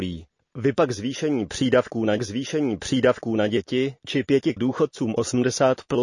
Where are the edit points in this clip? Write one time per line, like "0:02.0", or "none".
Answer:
0:02.2
0:04.6